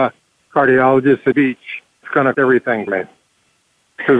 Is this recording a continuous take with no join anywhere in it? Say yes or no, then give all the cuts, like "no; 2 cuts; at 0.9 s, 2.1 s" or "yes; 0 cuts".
no; 4 cuts; at 1.3 s, 2.0 s, 2.3 s, 2.9 s